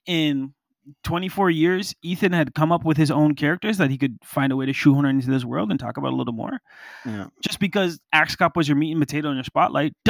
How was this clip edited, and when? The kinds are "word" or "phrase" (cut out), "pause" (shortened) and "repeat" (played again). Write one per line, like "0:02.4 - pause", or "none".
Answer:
0:08.0 - pause